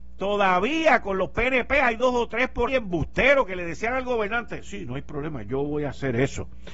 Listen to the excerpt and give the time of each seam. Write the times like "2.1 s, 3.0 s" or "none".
2.7 s